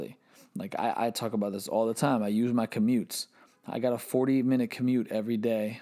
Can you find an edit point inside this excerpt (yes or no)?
no